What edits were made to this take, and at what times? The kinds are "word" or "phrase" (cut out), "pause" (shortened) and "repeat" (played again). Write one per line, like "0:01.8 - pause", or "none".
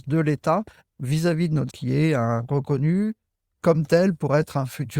0:01.7 - word